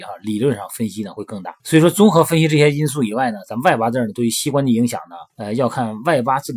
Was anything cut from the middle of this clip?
yes; 2 cuts; at 1.6 s, 5.3 s

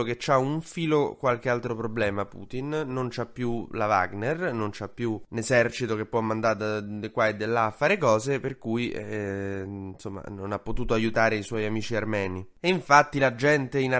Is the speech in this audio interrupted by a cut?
no; 0 cuts

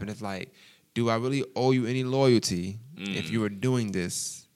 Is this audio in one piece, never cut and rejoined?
yes; 0 cuts

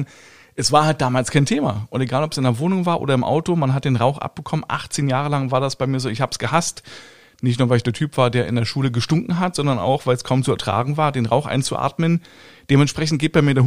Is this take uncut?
yes; 0 cuts

